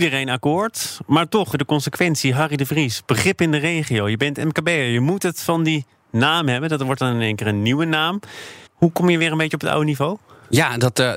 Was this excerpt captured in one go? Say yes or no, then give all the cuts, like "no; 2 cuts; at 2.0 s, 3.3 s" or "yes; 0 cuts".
no; 2 cuts; at 1.5 s, 8.7 s